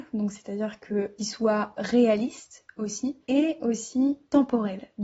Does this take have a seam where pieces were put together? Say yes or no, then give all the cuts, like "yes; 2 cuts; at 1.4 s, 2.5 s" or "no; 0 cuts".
yes; 2 cuts; at 1.2 s, 3.2 s